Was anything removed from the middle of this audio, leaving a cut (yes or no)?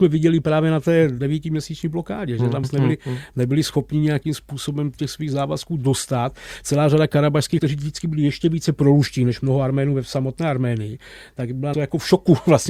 yes